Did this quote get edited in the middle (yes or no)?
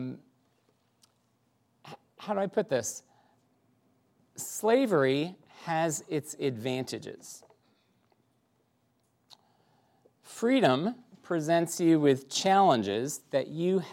no